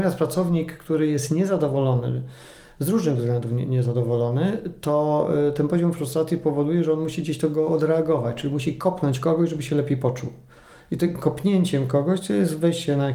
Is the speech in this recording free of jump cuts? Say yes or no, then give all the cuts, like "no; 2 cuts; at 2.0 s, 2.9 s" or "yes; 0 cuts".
yes; 0 cuts